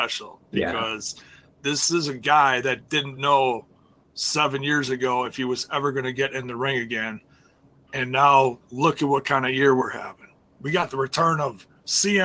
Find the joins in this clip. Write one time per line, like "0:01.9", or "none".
none